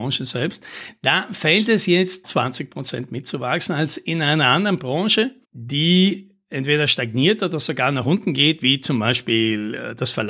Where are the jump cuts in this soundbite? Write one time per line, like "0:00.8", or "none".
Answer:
0:02.2
0:05.4